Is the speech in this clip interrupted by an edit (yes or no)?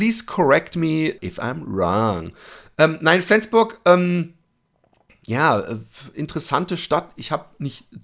yes